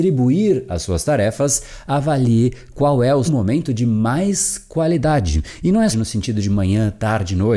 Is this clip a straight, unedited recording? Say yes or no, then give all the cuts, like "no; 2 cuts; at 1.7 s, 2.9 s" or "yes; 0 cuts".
no; 2 cuts; at 3.3 s, 5.9 s